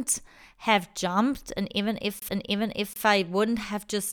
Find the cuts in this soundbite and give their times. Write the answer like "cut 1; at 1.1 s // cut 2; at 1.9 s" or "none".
cut 1; at 2.3 s